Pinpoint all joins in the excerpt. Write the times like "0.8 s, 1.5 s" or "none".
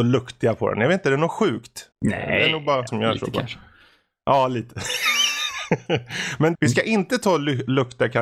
1.9 s, 2.9 s, 6.5 s